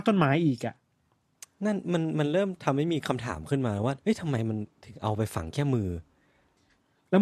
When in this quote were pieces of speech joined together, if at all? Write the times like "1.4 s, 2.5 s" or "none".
4.0 s